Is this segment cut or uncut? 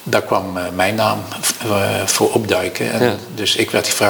uncut